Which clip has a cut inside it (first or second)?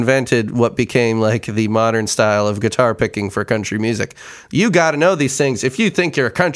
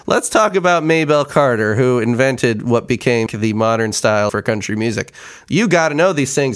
second